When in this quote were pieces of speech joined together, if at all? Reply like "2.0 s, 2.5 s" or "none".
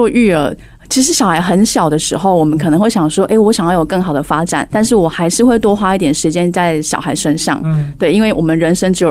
4.7 s